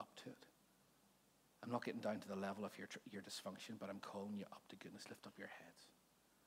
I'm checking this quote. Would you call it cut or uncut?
uncut